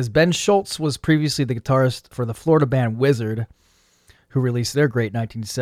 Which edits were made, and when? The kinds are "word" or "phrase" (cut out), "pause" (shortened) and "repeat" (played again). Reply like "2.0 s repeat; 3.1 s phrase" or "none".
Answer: 2.1 s word